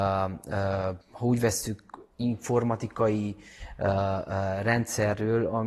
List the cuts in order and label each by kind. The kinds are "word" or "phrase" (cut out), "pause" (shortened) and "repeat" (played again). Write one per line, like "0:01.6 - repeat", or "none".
0:01.0 - pause

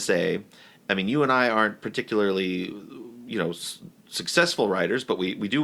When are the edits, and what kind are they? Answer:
none

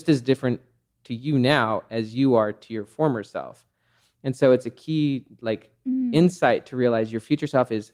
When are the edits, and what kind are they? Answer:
none

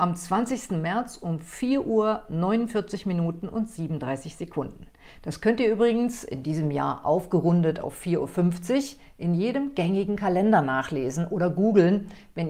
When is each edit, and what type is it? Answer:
none

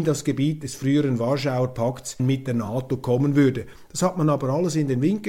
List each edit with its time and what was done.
0:02.2 - word

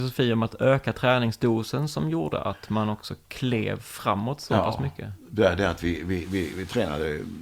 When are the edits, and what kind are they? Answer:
none

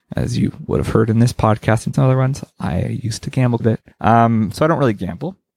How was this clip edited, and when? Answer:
0:01.9 - word
0:03.6 - word
0:03.9 - pause

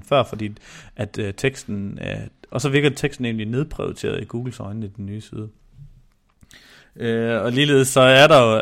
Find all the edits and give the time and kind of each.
none

